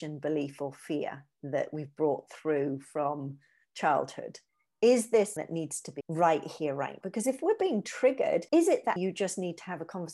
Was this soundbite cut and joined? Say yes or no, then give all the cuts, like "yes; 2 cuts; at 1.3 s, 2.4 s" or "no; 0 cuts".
yes; 6 cuts; at 4.5 s, 5.4 s, 6.0 s, 7.0 s, 8.5 s, 9.0 s